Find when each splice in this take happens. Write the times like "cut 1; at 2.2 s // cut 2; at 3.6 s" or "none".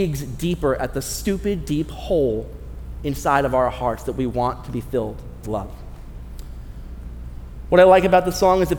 cut 1; at 5.4 s